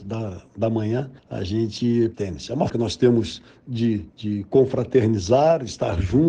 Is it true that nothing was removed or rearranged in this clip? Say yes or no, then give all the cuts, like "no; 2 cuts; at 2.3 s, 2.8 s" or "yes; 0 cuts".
no; 4 cuts; at 1.2 s, 2.1 s, 2.7 s, 4.1 s